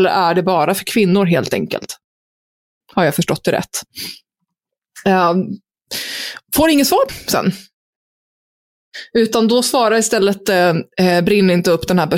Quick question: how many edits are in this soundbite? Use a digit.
1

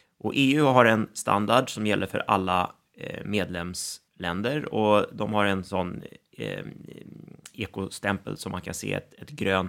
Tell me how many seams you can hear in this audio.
1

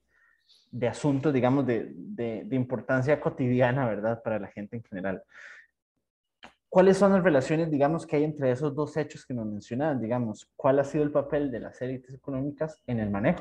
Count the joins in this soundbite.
0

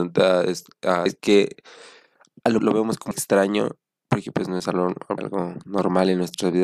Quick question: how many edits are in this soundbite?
4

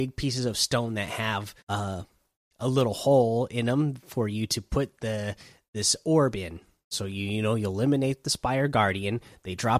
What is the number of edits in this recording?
1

